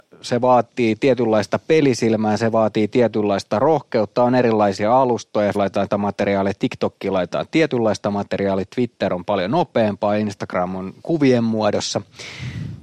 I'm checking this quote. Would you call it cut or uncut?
cut